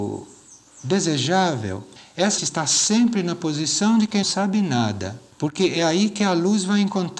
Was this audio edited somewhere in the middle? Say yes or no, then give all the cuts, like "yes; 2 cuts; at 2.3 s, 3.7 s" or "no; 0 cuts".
yes; 3 cuts; at 2.4 s, 4.2 s, 5.3 s